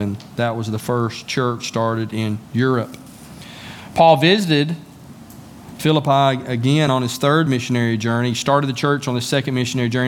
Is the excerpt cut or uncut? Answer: uncut